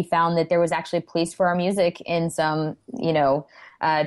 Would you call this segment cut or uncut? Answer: uncut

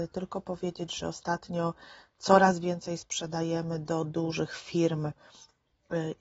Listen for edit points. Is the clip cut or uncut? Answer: uncut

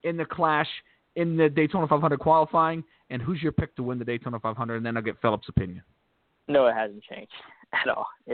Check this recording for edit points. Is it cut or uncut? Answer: uncut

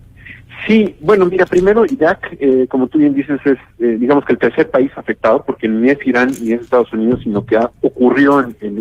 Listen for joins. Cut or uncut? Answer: uncut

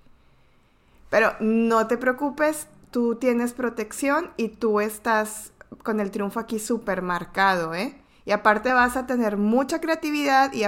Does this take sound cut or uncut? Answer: uncut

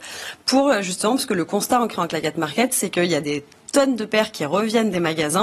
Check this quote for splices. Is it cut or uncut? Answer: uncut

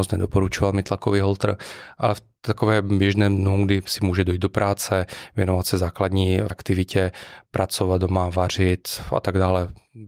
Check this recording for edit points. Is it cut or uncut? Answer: cut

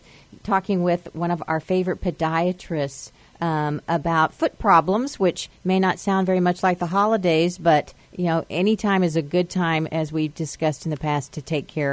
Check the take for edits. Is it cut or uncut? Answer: cut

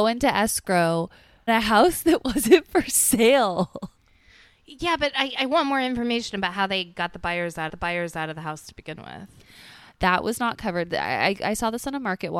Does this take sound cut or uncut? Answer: cut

